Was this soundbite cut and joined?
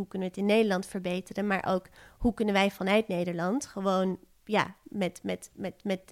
no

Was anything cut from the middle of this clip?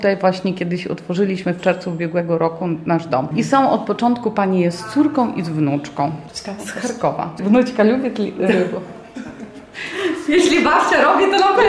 no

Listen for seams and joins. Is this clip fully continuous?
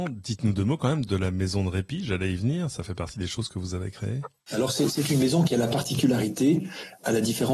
yes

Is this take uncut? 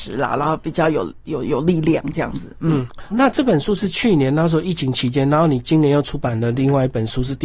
no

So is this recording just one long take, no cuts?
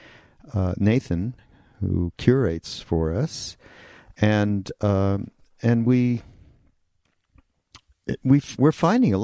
yes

